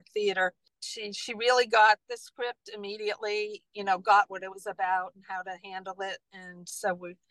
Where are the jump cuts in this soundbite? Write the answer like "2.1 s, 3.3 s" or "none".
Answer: none